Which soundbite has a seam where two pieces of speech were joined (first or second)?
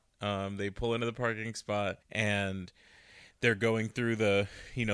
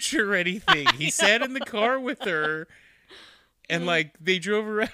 first